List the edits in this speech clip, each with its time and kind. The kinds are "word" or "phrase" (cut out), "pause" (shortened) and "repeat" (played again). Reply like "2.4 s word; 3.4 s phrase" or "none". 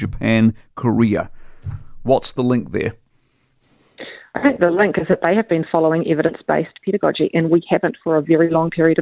none